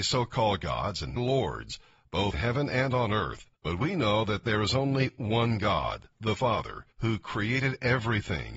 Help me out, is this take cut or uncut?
cut